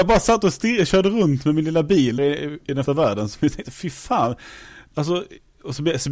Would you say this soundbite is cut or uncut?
cut